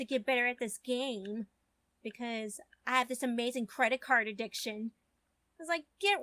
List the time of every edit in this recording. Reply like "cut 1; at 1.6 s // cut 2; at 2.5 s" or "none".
none